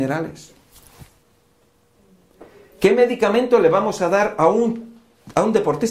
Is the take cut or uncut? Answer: uncut